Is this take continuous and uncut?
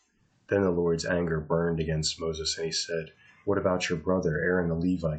yes; 0 cuts

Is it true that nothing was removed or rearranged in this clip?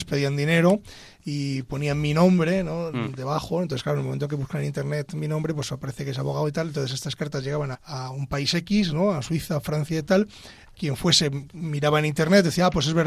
no; 1 cut; at 7.7 s

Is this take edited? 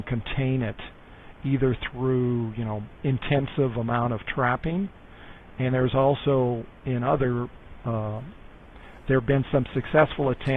yes; 3 cuts; at 3.0 s, 5.7 s, 6.8 s

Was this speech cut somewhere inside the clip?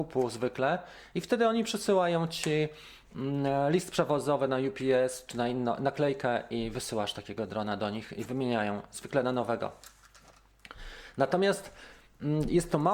no; 0 cuts

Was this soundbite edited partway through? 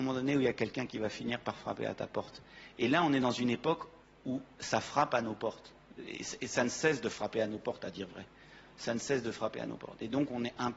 no; 0 cuts

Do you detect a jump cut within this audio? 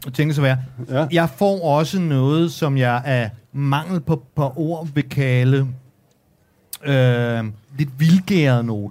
yes; 3 cuts; at 3.4 s, 4.3 s, 7.6 s

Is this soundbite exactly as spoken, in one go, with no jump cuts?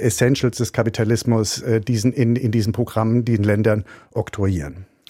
yes; 0 cuts

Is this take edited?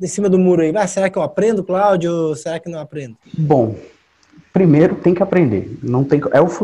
no; 0 cuts

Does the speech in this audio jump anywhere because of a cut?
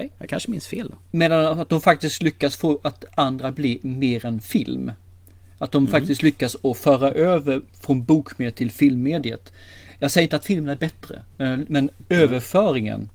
yes; 1 cut; at 7.7 s

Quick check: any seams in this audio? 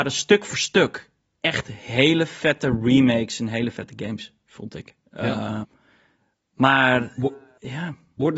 yes; 1 cut; at 5.6 s

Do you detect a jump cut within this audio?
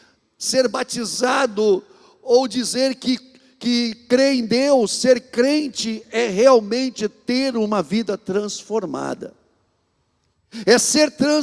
no; 0 cuts

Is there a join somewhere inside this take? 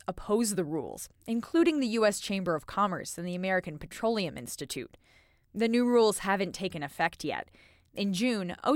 no; 0 cuts

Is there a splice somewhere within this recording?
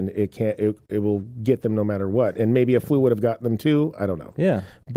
no; 0 cuts

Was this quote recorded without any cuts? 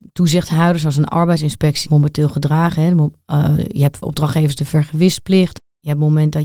no; 2 cuts; at 1.9 s, 4.0 s

